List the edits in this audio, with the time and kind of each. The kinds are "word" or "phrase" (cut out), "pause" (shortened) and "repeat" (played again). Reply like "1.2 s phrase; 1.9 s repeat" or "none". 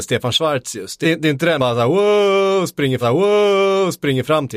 1.0 s phrase; 1.6 s word; 3.0 s repeat